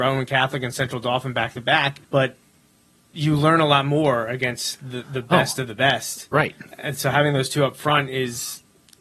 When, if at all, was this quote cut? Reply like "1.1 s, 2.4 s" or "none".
2.0 s